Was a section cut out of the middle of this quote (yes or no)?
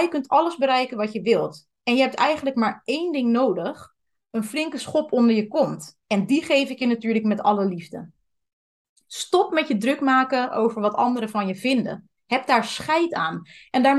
yes